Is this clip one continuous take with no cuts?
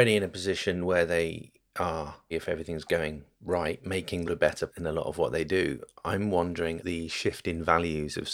no; 5 cuts; at 2.3 s, 3.3 s, 4.2 s, 4.7 s, 6.8 s

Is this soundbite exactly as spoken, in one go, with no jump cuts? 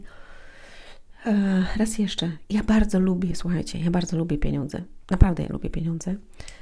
yes; 0 cuts

